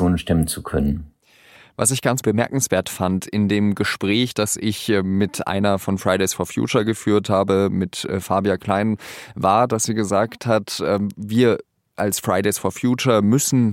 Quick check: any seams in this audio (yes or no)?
no